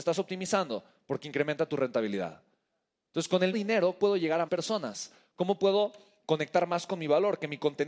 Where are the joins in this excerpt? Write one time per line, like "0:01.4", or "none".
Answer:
0:03.5
0:04.0
0:04.5